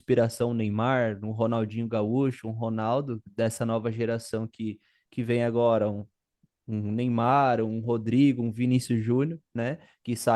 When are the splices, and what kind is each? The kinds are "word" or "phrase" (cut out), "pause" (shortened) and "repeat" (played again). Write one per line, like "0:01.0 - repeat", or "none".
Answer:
none

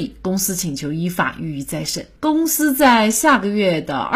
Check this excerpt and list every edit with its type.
0:02.2 - pause

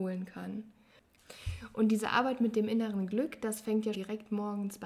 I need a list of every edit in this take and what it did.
0:03.9 - word

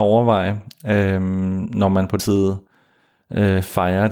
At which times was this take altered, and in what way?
0:02.2 - word

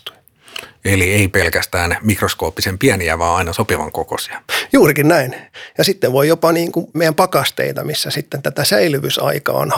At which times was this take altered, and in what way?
0:01.3 - phrase
0:06.9 - word

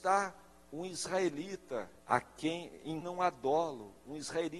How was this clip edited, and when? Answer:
0:02.0 - pause
0:03.0 - word

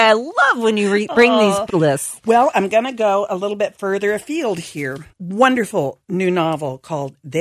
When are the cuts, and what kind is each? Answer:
0:01.7 - word
0:05.1 - pause

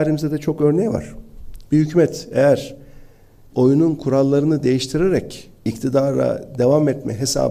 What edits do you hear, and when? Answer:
0:01.7 - pause
0:03.5 - word
0:05.6 - pause

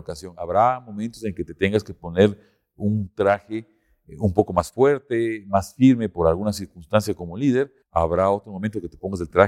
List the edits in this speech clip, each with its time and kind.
0:07.8 - pause

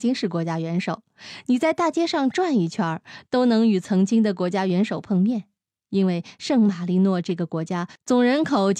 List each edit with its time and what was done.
none

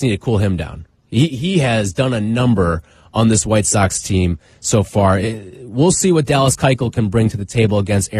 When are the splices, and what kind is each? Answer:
none

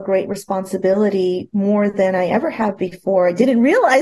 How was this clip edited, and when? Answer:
none

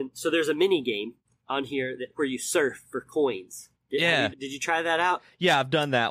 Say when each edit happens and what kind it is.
0:04.3 - word

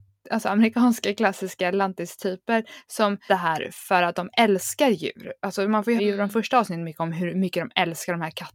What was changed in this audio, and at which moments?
0:03.3 - phrase
0:06.0 - word

